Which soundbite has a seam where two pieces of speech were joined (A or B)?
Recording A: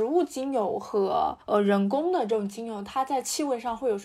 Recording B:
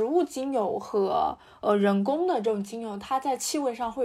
A